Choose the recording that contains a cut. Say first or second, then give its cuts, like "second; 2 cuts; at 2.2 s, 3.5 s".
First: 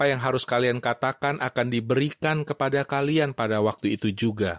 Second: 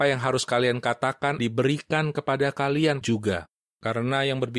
second; 2 cuts; at 1.4 s, 3.0 s